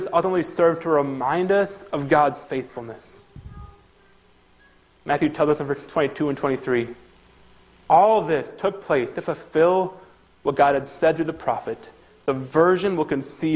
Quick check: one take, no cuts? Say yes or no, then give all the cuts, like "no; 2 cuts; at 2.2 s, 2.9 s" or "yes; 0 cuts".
yes; 0 cuts